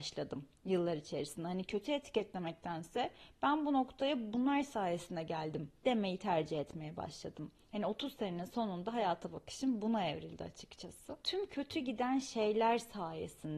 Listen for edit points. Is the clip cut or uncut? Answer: cut